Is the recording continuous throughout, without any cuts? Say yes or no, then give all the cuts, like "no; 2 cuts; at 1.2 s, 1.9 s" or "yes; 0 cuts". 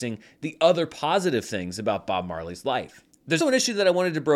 no; 1 cut; at 3.4 s